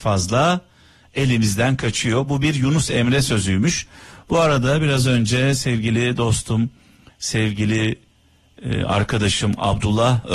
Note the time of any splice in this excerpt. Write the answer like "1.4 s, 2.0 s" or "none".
none